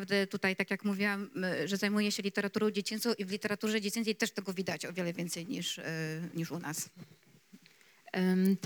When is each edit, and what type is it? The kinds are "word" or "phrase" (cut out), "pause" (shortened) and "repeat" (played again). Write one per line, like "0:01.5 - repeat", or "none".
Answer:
none